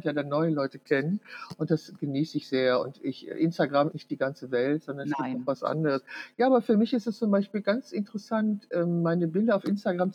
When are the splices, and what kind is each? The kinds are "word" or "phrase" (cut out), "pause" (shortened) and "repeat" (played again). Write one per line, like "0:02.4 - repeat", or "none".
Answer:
0:03.9 - word